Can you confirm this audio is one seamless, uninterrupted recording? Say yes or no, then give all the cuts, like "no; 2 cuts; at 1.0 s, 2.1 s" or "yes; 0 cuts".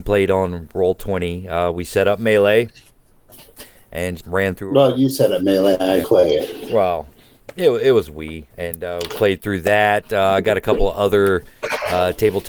no; 3 cuts; at 4.2 s, 6.0 s, 8.5 s